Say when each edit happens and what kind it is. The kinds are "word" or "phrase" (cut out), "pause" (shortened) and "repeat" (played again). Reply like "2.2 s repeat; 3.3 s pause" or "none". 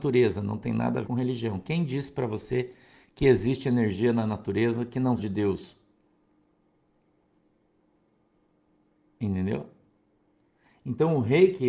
1.0 s word; 5.2 s phrase